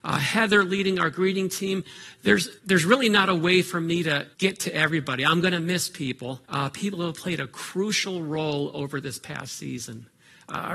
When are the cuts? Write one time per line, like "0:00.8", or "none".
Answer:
0:02.6
0:04.3
0:06.4